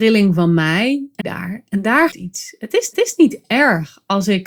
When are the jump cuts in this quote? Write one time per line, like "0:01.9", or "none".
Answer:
0:01.2
0:02.1
0:02.9

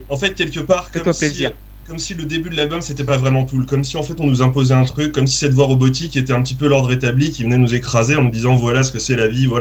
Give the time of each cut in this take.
none

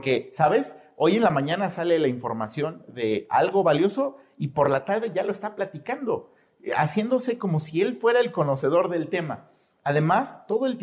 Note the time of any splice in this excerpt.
none

